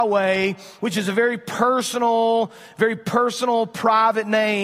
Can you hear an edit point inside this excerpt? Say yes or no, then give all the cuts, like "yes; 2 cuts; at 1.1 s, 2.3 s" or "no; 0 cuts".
no; 0 cuts